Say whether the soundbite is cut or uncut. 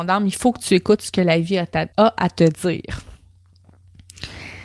cut